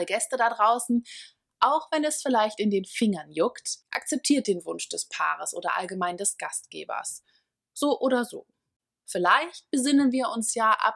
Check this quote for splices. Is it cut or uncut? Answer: cut